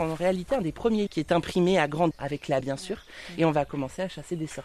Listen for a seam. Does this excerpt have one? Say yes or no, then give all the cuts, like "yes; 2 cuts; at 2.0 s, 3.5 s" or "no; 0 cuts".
yes; 3 cuts; at 1.1 s, 2.1 s, 2.6 s